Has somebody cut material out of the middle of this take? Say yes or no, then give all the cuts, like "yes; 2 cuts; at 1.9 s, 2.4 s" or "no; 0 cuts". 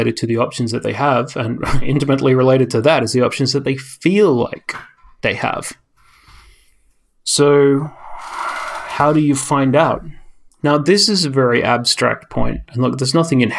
no; 0 cuts